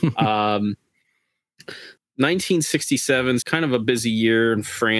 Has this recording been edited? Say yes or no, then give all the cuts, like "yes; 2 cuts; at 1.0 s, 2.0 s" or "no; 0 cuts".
yes; 2 cuts; at 2.0 s, 3.4 s